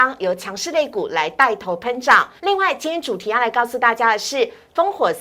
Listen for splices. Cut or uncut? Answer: cut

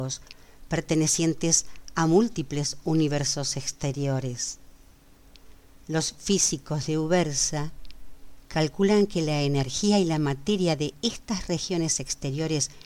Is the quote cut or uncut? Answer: uncut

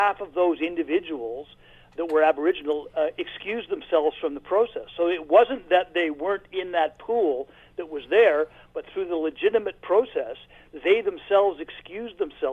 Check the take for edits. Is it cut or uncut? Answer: uncut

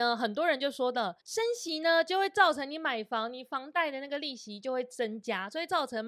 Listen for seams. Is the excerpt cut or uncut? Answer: cut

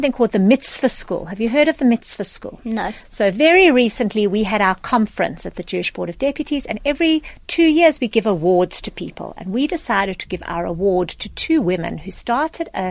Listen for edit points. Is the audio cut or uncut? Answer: uncut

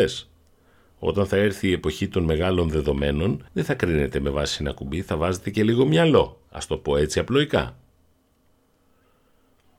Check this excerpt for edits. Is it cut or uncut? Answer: cut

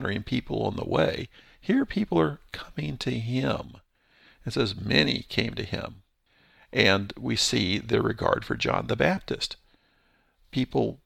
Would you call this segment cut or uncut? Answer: uncut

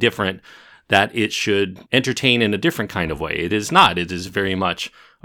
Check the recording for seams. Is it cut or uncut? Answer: uncut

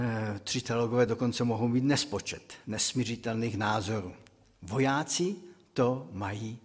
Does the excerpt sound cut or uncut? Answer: uncut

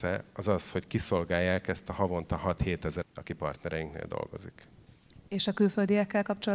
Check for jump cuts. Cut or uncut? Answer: cut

